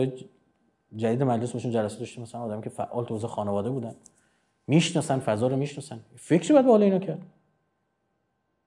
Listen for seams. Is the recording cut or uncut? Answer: uncut